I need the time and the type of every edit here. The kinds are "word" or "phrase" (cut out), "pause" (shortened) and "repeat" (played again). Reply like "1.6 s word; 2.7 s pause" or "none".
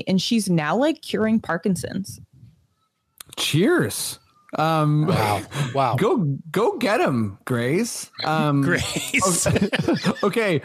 none